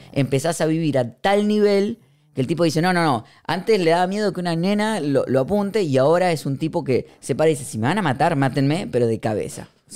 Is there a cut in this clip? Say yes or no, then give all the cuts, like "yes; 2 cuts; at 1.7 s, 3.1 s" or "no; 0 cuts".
no; 0 cuts